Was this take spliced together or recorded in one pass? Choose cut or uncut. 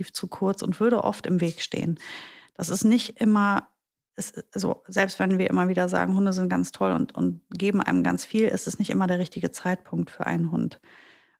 uncut